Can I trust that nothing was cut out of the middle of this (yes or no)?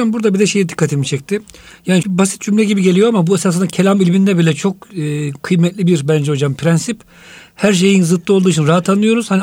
no